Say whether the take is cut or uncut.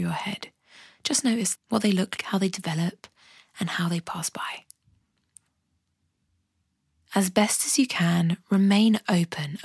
cut